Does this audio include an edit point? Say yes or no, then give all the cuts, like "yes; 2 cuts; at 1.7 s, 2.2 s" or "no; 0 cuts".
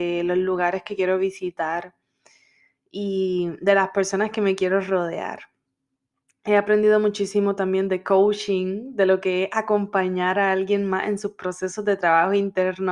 no; 0 cuts